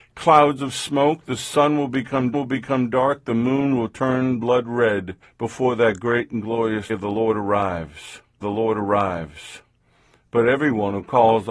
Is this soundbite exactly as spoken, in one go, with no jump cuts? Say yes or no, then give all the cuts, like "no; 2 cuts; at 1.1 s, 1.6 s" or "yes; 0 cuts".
no; 4 cuts; at 2.3 s, 5.2 s, 6.9 s, 8.4 s